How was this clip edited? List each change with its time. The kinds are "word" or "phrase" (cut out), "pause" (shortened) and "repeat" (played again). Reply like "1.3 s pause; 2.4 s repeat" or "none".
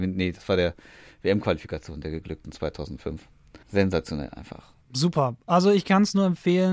3.6 s pause; 4.8 s pause